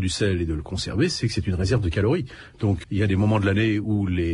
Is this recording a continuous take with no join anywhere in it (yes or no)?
no